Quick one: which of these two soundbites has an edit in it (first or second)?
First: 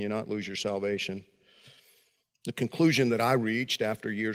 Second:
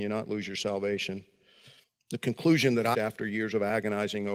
second